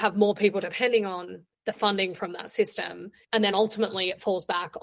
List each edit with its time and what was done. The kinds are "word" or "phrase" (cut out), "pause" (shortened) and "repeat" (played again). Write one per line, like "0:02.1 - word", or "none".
none